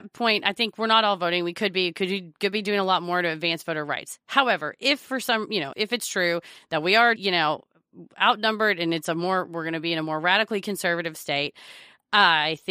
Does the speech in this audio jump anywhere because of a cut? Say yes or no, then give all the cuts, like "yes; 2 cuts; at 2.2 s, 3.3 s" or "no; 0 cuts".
yes; 2 cuts; at 5.7 s, 7.2 s